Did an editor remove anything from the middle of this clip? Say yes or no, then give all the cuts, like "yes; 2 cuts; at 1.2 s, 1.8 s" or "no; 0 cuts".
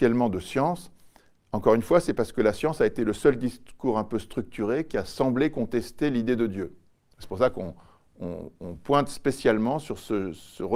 no; 0 cuts